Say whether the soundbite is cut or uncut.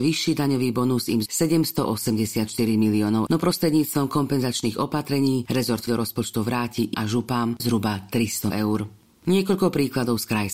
cut